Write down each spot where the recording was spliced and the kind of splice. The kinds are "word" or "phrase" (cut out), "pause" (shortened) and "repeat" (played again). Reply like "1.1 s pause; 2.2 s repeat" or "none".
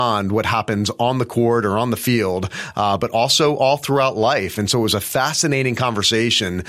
none

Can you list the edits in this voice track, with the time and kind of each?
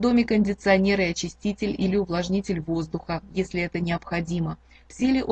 none

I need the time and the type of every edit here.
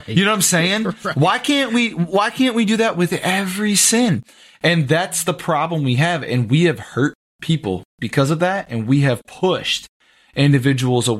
none

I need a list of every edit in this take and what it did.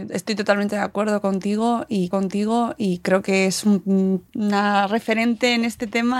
2.1 s repeat; 4.3 s pause

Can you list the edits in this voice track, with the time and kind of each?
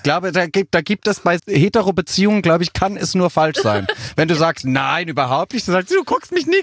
1.4 s word

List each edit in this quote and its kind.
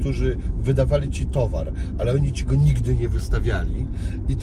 none

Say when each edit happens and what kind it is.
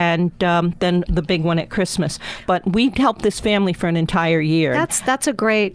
1.1 s word

